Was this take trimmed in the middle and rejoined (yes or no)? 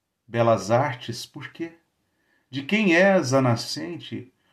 no